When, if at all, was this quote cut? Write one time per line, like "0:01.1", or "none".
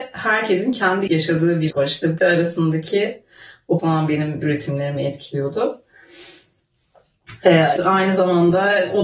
0:01.1
0:01.7
0:02.2
0:03.8
0:04.4
0:07.8